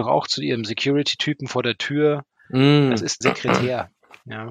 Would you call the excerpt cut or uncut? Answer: cut